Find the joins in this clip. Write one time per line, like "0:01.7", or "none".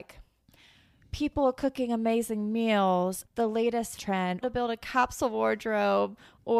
0:03.2
0:04.0
0:04.4

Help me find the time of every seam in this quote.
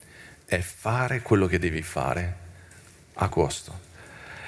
0:03.3

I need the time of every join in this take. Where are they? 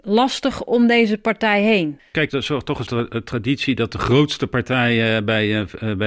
0:02.3
0:02.9

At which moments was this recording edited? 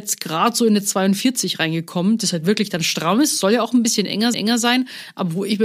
0:04.3

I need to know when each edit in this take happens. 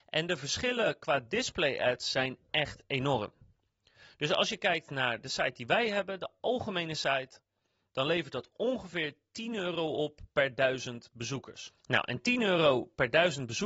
none

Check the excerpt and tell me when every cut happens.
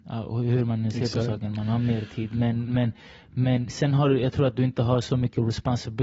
0:02.7

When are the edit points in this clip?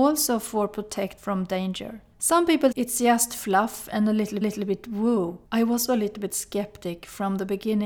0:01.2
0:02.1
0:02.7
0:04.4
0:05.4
0:05.9

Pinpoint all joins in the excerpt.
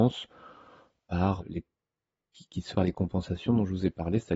0:01.4
0:02.7

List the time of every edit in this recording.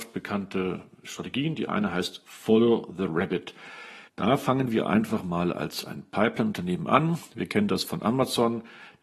0:04.1

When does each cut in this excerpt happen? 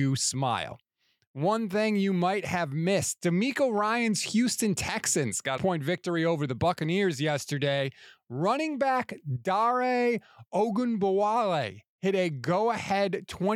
0:05.6

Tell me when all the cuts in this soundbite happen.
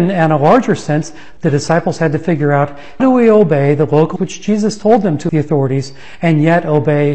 0:01.4
0:03.0
0:04.2
0:05.3

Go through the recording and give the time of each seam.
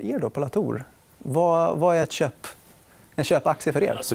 none

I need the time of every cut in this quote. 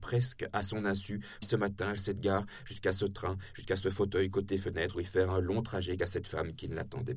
0:01.4
0:02.0
0:04.9
0:06.0

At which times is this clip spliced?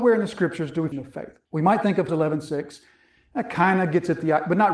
0:00.9
0:01.5
0:02.1

